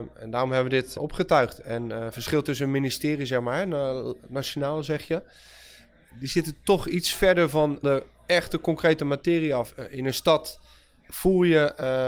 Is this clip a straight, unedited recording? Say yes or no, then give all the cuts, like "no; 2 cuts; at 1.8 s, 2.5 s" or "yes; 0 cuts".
no; 2 cuts; at 1.0 s, 7.8 s